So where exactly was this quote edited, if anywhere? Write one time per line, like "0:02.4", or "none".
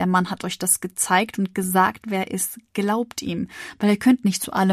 none

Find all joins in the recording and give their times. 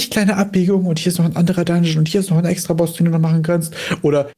none

